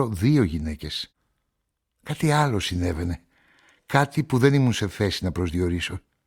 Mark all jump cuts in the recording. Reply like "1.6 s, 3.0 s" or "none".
none